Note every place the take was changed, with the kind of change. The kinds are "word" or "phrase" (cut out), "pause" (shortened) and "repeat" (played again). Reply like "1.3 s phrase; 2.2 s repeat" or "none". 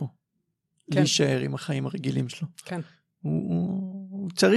none